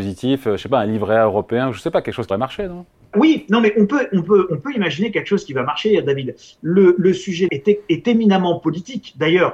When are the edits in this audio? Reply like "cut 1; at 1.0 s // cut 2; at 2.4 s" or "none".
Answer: cut 1; at 2.3 s // cut 2; at 3.1 s // cut 3; at 7.0 s // cut 4; at 7.5 s